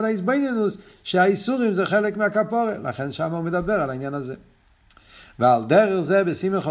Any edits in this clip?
no; 0 cuts

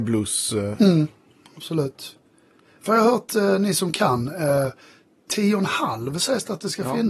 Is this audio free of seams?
yes; 0 cuts

